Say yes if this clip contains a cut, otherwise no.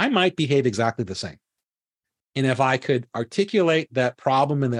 no